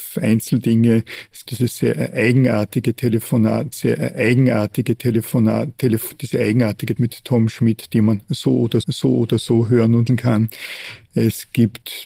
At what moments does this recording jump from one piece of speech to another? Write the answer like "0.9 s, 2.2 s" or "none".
1.4 s, 3.7 s, 7.0 s, 8.8 s, 10.1 s